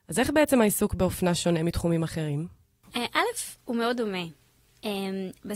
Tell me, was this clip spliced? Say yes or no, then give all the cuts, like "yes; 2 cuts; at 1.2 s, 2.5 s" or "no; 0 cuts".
no; 0 cuts